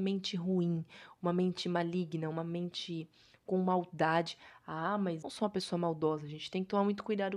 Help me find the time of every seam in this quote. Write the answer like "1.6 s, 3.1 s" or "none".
5.2 s